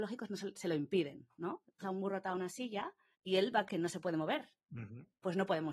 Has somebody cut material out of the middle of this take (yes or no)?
yes